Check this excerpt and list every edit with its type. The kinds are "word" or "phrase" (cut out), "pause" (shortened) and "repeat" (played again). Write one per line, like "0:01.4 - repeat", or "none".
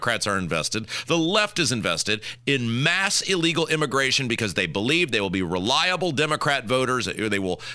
none